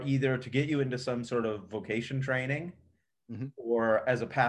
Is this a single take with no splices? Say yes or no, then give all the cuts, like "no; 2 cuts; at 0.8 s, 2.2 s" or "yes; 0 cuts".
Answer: yes; 0 cuts